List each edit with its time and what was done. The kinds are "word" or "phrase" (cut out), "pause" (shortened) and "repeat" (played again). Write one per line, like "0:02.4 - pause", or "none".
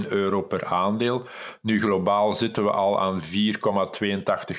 none